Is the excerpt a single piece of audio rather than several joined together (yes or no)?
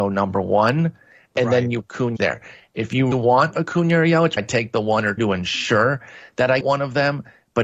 no